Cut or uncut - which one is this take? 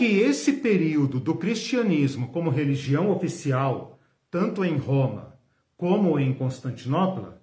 uncut